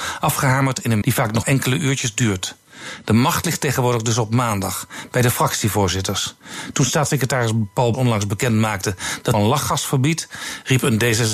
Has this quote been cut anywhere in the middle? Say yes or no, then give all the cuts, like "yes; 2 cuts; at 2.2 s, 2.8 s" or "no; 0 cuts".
yes; 4 cuts; at 1.0 s, 1.4 s, 7.9 s, 9.3 s